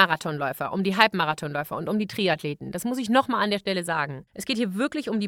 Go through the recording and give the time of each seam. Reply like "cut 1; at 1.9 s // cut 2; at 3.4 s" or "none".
cut 1; at 4.3 s